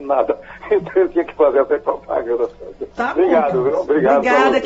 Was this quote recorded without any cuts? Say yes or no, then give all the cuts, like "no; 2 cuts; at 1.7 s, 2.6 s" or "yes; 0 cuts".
no; 1 cut; at 2.9 s